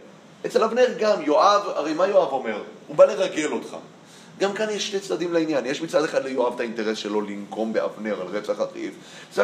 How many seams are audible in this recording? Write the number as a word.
zero